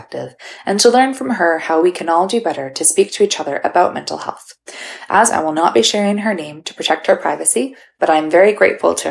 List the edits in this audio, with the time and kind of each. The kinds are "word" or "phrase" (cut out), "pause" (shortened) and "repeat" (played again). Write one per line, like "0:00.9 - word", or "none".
0:05.3 - word